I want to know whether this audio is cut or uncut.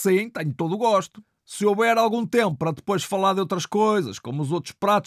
uncut